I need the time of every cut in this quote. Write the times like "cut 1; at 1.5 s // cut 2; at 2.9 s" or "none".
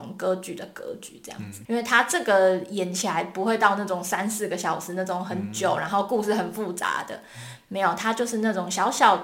cut 1; at 1.7 s